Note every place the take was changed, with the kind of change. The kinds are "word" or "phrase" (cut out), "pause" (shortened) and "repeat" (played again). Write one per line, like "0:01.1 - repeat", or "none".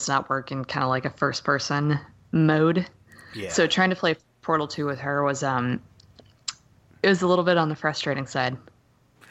none